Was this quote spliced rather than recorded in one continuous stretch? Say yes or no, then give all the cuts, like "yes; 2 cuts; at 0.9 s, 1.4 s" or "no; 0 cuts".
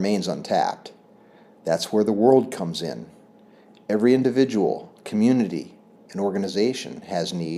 no; 0 cuts